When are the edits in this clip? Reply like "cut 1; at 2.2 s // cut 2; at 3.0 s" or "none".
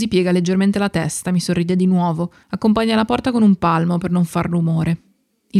cut 1; at 2.4 s